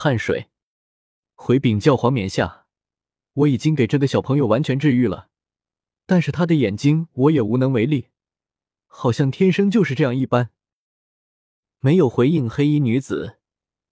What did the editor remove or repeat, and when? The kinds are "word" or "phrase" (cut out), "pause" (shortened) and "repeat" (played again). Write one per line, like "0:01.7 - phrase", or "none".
none